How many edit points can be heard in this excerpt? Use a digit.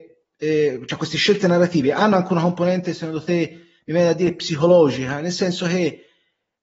0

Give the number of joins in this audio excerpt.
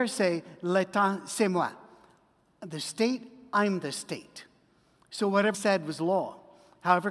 1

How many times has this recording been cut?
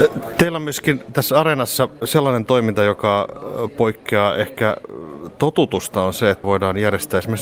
1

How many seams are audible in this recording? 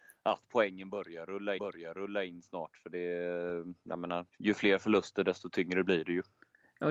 2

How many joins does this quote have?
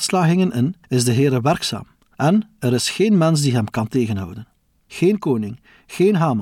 0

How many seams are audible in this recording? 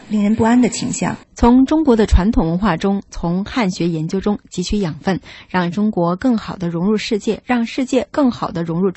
1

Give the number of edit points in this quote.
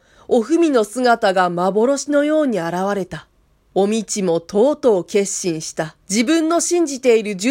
2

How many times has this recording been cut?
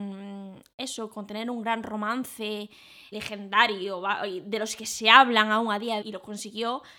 2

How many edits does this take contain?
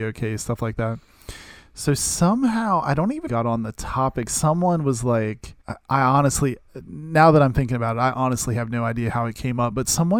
2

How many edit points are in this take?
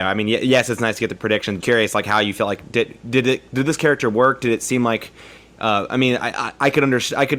1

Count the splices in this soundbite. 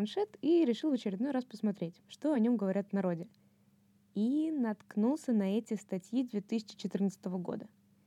0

